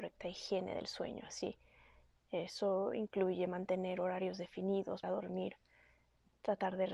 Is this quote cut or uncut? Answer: cut